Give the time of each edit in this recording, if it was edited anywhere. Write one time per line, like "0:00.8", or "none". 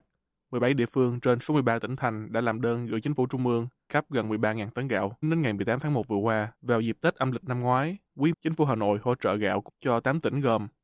0:03.9
0:05.2
0:06.5
0:08.3
0:09.7